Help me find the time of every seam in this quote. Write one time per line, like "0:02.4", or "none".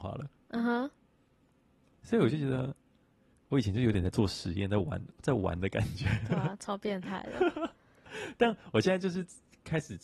0:07.8